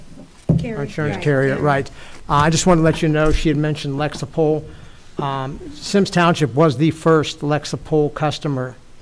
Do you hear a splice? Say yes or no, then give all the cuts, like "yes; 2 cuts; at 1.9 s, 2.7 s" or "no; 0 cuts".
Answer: no; 0 cuts